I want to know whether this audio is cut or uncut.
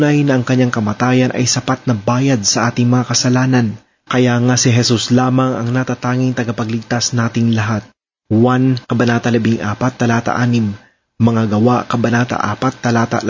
uncut